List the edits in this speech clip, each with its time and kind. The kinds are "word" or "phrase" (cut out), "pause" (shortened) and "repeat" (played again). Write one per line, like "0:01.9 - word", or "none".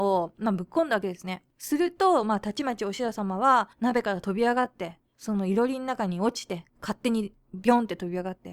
0:03.7 - pause
0:06.7 - pause